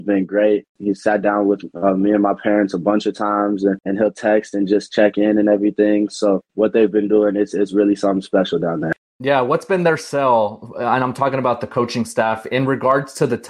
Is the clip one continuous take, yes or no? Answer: yes